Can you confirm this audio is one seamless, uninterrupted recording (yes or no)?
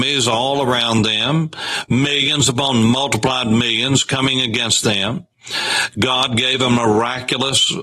yes